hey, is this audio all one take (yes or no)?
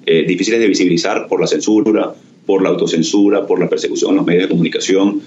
yes